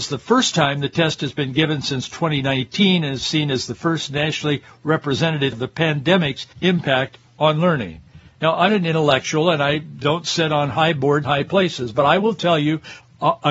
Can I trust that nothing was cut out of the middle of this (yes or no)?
no